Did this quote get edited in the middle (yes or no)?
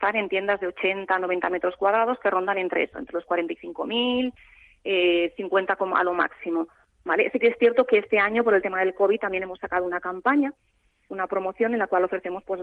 no